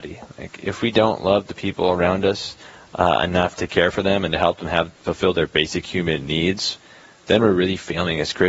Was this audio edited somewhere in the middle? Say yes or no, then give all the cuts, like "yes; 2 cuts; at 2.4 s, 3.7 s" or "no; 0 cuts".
no; 0 cuts